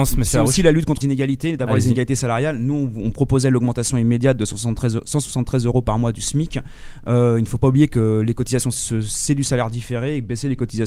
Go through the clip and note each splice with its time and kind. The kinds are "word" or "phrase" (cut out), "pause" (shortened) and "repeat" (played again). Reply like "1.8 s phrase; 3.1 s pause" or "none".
1.0 s word; 8.7 s word